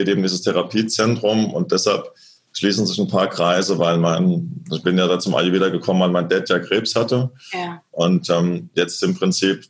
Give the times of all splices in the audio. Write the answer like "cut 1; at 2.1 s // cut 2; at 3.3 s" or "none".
none